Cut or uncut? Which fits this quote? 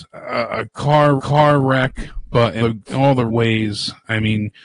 cut